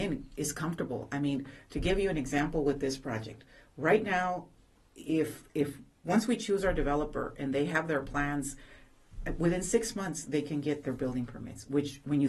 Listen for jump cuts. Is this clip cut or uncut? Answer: uncut